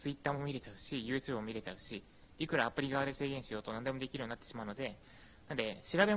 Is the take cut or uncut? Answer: uncut